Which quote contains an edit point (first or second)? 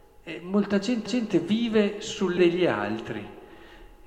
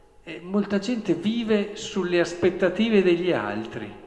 first